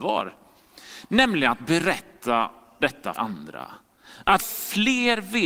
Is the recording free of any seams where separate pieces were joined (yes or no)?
no